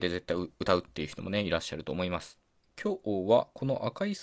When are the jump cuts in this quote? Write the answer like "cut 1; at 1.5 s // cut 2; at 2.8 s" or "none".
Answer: cut 1; at 2.5 s